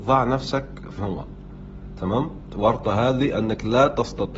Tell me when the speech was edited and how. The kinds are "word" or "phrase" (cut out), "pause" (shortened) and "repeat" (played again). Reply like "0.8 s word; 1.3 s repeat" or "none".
1.0 s word